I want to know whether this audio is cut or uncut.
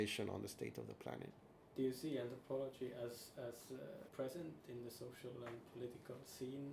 cut